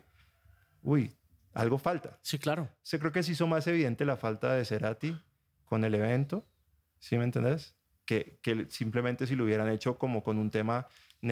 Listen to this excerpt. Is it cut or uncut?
uncut